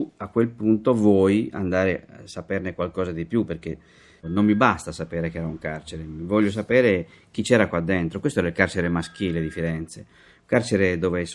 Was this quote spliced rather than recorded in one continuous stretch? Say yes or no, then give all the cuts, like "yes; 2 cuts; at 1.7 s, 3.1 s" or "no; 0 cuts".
no; 0 cuts